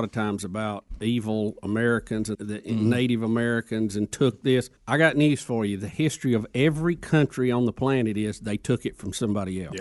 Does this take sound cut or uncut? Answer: cut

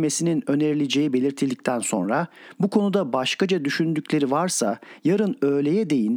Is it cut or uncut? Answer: uncut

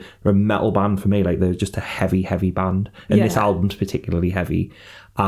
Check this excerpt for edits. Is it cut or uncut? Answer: uncut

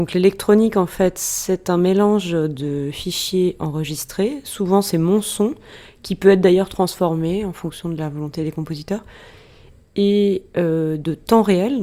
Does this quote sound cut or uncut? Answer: uncut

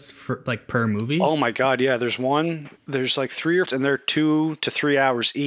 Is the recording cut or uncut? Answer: cut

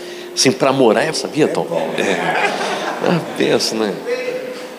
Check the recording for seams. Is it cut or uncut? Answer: cut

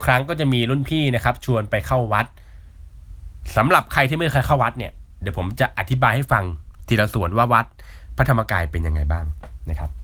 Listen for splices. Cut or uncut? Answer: uncut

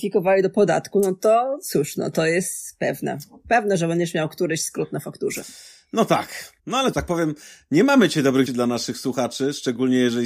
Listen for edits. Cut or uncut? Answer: cut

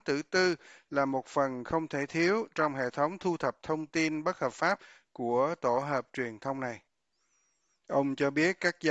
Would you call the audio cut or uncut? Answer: uncut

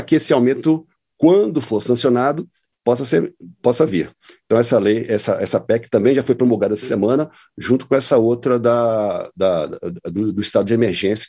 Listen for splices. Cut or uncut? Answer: uncut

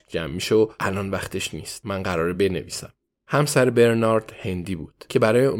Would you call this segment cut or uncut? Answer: uncut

